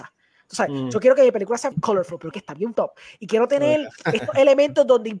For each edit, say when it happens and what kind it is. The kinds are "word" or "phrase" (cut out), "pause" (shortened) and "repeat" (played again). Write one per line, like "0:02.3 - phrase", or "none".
0:01.7 - phrase
0:02.3 - phrase
0:02.8 - word

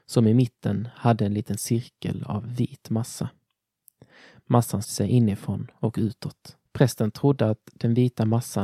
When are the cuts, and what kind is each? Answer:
0:04.8 - word
0:06.7 - pause

